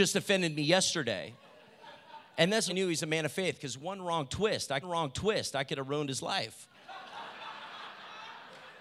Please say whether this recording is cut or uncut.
cut